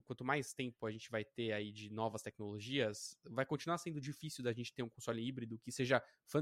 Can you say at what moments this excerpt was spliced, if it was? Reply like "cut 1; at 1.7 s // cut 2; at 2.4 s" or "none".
none